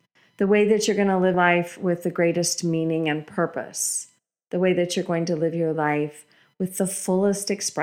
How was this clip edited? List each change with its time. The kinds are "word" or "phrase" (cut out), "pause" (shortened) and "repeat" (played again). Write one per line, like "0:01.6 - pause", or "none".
0:01.3 - word